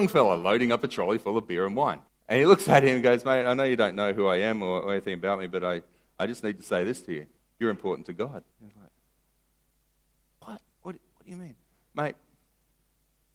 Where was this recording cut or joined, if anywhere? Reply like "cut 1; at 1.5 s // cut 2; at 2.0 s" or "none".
cut 1; at 2.1 s // cut 2; at 7.4 s // cut 3; at 8.5 s // cut 4; at 10.7 s